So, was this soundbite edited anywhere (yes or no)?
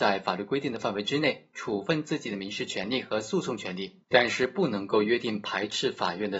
yes